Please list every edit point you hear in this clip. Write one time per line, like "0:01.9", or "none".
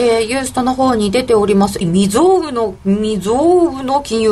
0:01.8